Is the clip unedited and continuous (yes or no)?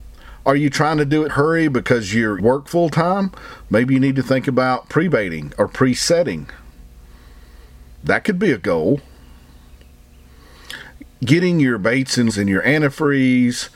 no